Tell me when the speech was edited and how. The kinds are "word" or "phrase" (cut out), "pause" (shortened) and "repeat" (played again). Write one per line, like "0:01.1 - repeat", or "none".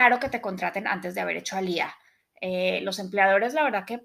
none